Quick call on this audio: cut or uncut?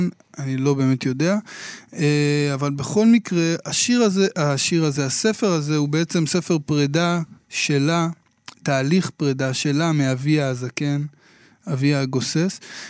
uncut